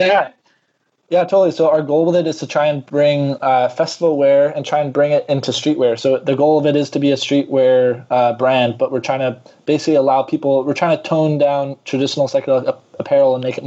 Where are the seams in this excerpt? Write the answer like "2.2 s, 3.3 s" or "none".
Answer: none